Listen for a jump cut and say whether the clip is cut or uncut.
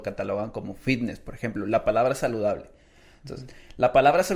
uncut